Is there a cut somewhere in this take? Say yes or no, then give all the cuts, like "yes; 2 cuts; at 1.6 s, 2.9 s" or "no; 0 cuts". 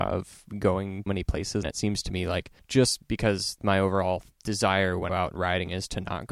yes; 5 cuts; at 1.1 s, 1.6 s, 2.6 s, 4.3 s, 5.1 s